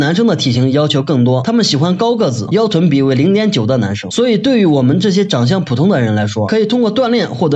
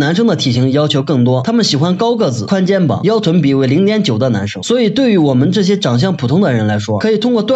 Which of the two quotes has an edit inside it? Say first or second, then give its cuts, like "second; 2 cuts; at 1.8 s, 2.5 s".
first; 1 cut; at 2.5 s